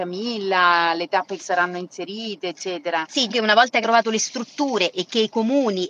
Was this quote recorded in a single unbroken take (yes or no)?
no